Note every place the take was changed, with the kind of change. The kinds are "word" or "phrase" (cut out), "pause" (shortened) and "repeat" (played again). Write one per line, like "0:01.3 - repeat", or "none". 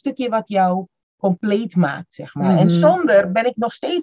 none